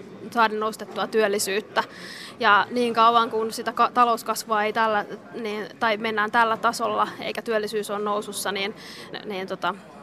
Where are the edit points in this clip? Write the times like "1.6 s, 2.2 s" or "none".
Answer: 9.1 s